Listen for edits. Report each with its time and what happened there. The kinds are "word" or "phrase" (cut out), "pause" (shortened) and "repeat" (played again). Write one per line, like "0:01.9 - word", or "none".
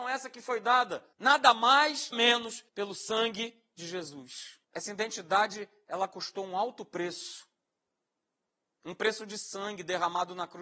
0:01.1 - pause
0:02.1 - word
0:02.7 - pause
0:04.6 - pause